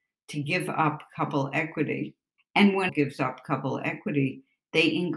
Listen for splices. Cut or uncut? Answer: cut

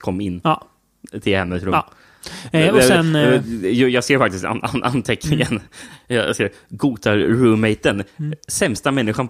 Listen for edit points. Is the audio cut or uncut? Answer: uncut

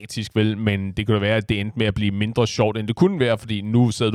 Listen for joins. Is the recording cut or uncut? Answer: uncut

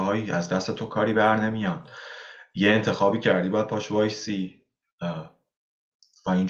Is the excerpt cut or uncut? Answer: uncut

